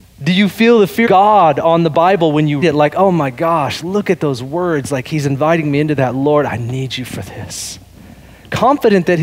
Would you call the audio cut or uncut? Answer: cut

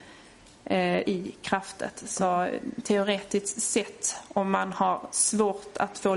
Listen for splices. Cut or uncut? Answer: cut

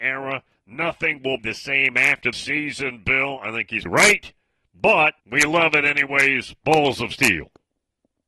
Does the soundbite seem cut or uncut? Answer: cut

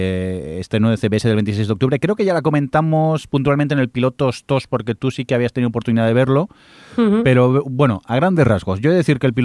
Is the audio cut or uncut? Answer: uncut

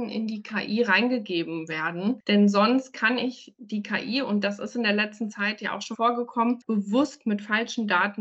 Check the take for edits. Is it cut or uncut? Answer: cut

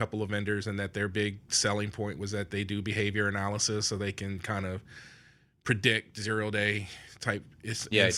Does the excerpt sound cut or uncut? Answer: uncut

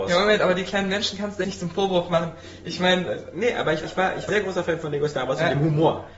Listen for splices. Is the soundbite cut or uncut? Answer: cut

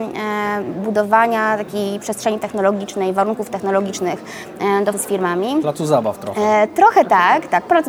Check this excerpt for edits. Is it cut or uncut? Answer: cut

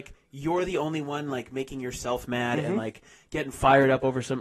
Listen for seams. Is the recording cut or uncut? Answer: uncut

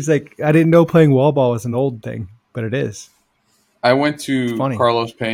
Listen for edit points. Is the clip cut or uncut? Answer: uncut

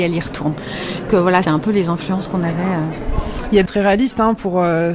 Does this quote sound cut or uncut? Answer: cut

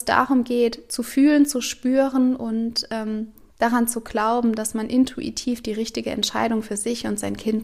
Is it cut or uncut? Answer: uncut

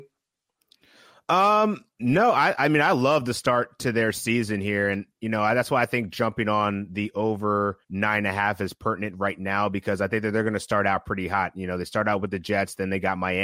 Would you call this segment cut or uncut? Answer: cut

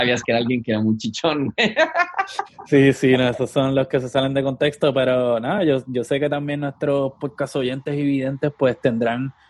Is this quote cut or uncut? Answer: uncut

